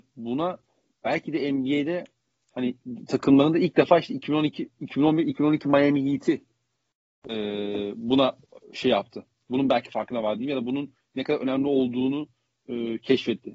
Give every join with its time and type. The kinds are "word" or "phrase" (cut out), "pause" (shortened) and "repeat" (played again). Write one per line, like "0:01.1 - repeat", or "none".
none